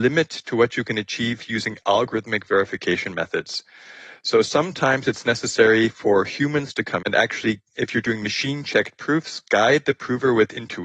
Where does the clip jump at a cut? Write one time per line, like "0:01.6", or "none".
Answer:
0:07.0
0:07.7

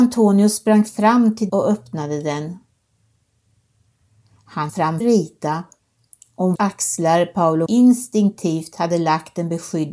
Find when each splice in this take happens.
0:01.5
0:04.7
0:05.0
0:06.6
0:07.7

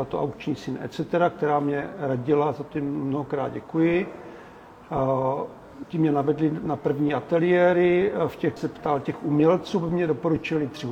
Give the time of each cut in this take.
0:08.6

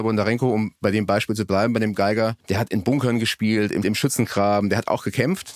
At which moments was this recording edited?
0:02.4
0:03.8

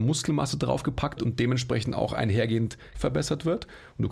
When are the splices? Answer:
0:01.2
0:02.9

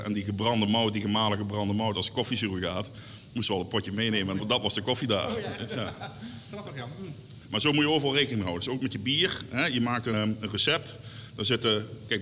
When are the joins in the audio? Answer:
0:04.4
0:10.1

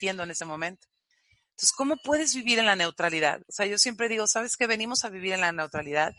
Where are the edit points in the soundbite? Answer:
none

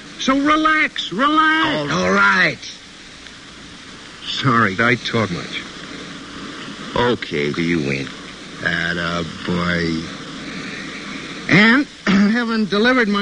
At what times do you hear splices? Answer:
0:01.9
0:04.8
0:05.3
0:07.5
0:12.3

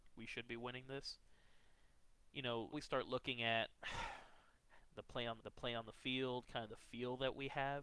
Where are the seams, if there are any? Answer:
0:02.7
0:05.4

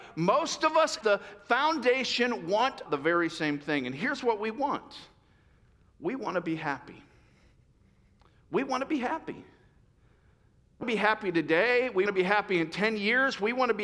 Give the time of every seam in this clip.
0:01.0
0:02.9
0:10.8
0:12.1

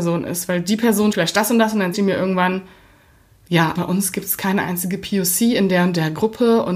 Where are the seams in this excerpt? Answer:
0:01.1
0:01.9
0:03.8

